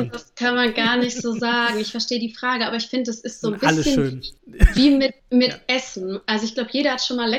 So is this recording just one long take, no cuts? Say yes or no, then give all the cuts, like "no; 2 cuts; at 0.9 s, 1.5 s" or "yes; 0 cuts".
no; 2 cuts; at 4.4 s, 5.2 s